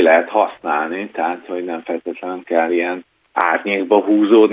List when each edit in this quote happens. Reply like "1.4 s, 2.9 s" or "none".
none